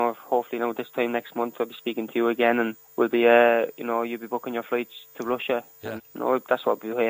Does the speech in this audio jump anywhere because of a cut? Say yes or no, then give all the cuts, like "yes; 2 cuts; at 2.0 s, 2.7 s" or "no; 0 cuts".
yes; 2 cuts; at 2.8 s, 6.0 s